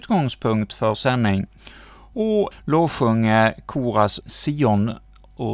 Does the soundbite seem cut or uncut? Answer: cut